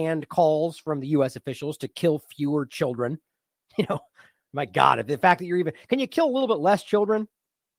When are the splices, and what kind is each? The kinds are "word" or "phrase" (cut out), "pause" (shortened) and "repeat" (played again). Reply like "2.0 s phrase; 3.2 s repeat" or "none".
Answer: none